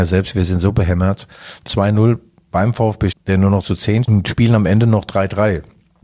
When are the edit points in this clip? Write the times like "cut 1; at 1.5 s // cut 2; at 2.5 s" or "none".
cut 1; at 1.7 s // cut 2; at 3.1 s // cut 3; at 4.0 s